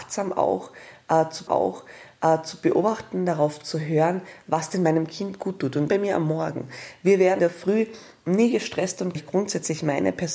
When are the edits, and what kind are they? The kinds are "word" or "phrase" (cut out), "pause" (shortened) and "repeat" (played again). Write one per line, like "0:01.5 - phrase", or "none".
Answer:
0:01.5 - repeat
0:05.9 - phrase
0:07.4 - word
0:09.2 - phrase